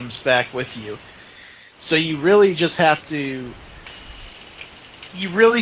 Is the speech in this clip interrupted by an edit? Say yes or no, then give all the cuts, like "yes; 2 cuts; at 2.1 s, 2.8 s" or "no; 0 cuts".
no; 0 cuts